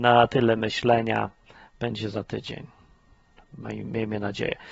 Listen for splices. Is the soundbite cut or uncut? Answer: uncut